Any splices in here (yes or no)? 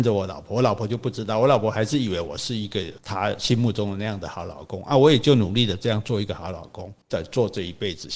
yes